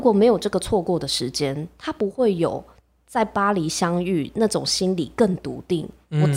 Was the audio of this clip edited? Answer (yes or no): no